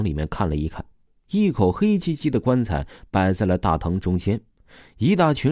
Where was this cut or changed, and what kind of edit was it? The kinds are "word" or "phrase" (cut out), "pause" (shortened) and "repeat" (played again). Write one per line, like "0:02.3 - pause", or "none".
none